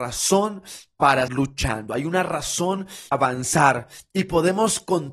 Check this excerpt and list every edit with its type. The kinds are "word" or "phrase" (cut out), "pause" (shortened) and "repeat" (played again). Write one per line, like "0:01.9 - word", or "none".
0:01.3 - word
0:03.1 - word